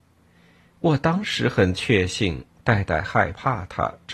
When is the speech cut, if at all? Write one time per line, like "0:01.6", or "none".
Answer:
0:02.5